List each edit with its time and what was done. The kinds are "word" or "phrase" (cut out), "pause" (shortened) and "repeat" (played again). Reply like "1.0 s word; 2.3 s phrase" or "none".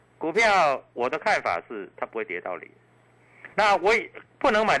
3.5 s pause